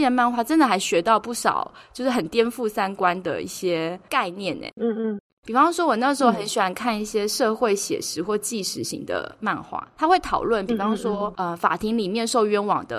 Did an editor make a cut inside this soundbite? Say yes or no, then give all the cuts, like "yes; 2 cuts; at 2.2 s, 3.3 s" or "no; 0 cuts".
yes; 1 cut; at 5.3 s